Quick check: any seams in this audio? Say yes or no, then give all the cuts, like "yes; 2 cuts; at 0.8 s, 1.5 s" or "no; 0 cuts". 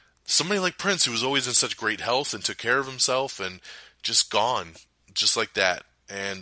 no; 0 cuts